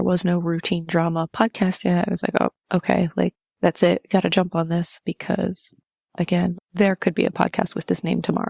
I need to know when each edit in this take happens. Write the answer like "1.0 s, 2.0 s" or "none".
3.4 s, 6.5 s